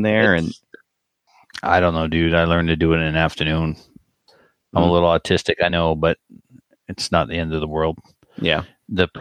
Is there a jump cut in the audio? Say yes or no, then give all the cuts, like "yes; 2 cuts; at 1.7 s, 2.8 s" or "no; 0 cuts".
no; 0 cuts